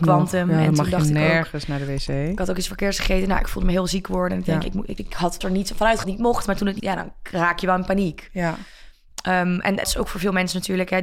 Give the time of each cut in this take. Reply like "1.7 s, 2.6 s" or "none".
4.6 s, 5.0 s, 5.4 s, 6.0 s, 6.8 s, 9.8 s